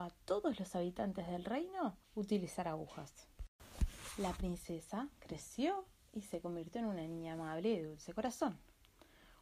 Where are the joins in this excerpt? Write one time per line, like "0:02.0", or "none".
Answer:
0:02.0